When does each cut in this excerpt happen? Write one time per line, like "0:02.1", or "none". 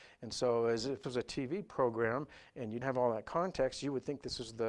0:01.0
0:02.8